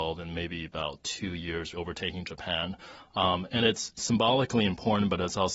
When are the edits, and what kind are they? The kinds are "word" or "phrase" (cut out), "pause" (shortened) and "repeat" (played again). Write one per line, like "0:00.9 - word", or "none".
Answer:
0:01.7 - phrase
0:04.0 - word